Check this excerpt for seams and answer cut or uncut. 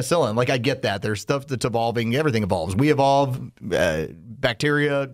uncut